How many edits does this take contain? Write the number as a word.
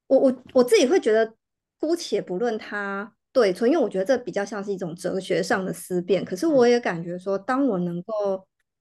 one